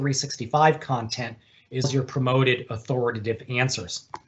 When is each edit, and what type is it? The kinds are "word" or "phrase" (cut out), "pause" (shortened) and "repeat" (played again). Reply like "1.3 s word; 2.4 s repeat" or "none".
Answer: 1.8 s word